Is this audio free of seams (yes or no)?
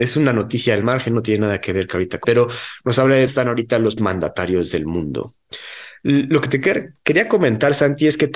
no